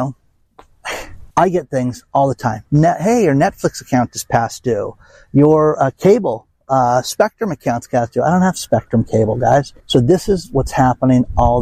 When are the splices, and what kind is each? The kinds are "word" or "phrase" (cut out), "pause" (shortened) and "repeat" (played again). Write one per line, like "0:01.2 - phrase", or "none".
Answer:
0:01.3 - pause
0:09.8 - pause